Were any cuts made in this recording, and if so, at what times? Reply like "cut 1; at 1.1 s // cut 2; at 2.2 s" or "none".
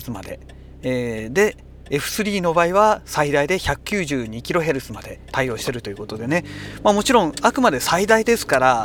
none